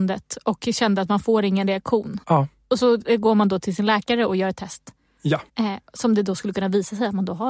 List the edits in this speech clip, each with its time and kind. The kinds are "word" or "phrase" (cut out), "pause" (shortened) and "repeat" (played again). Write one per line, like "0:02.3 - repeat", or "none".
0:02.2 - pause
0:05.5 - pause